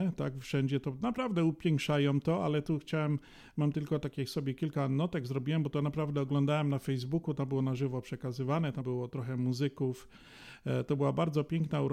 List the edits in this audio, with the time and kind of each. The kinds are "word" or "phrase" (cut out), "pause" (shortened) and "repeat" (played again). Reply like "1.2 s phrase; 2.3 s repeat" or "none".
8.8 s word